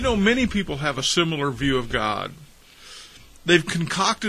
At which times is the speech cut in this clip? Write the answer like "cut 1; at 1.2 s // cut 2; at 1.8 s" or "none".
none